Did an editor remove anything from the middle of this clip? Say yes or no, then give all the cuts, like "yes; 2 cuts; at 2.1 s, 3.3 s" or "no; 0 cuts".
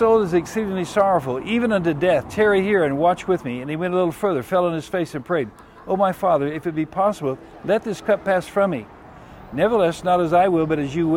no; 0 cuts